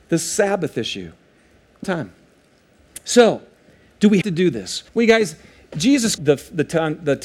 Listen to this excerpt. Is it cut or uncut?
cut